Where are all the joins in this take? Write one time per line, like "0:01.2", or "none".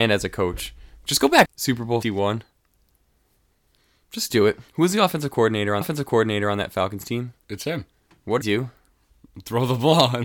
0:01.5
0:02.0
0:04.7
0:05.8
0:07.4
0:08.4